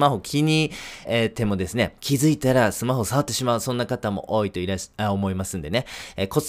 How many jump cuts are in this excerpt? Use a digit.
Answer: 2